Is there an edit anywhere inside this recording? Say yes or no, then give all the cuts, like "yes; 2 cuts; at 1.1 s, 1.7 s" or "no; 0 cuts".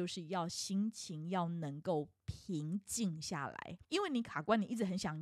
yes; 2 cuts; at 2.2 s, 3.8 s